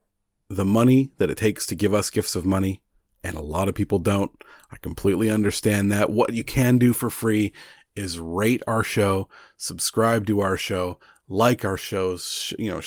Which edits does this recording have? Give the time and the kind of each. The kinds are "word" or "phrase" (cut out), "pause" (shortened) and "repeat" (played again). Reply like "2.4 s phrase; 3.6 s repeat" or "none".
none